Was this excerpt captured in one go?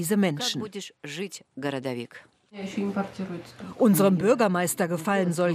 yes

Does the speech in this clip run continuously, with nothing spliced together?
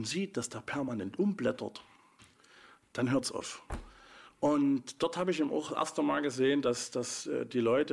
yes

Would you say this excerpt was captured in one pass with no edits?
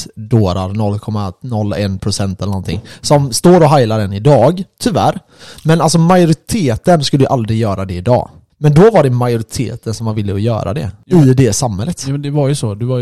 yes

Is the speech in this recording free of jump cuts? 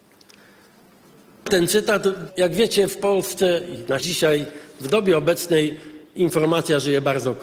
no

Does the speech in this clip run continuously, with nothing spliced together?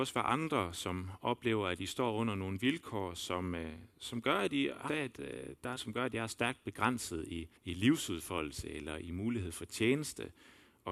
no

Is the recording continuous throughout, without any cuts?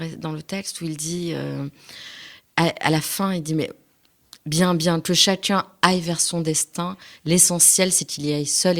no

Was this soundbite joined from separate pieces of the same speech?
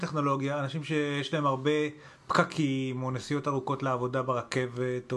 no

